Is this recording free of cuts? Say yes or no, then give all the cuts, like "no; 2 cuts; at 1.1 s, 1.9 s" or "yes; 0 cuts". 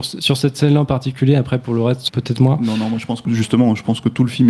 no; 2 cuts; at 2.1 s, 3.2 s